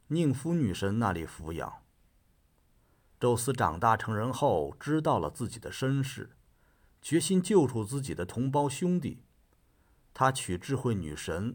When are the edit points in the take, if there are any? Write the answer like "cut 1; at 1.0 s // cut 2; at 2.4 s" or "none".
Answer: none